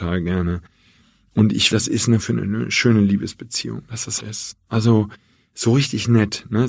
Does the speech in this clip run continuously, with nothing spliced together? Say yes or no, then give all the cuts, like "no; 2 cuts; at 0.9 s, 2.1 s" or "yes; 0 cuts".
no; 3 cuts; at 1.7 s, 2.2 s, 4.2 s